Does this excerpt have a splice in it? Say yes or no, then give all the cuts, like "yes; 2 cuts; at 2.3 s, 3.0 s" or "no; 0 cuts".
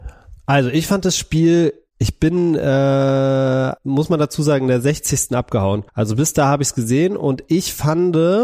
yes; 2 cuts; at 3.8 s, 5.9 s